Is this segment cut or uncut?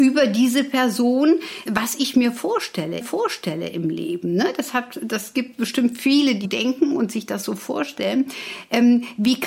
cut